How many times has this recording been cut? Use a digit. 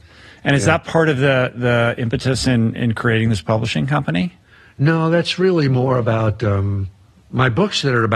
0